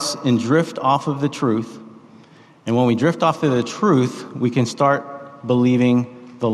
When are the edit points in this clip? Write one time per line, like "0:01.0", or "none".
none